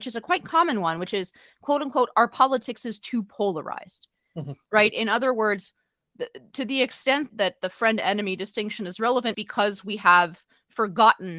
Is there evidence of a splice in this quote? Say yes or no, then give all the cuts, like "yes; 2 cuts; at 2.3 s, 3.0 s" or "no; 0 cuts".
yes; 2 cuts; at 7.3 s, 9.3 s